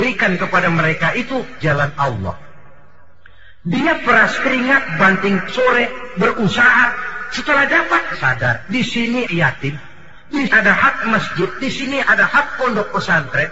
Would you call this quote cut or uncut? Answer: cut